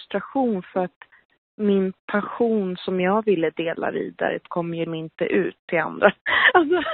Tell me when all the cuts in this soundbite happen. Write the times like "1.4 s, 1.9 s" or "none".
4.5 s, 4.9 s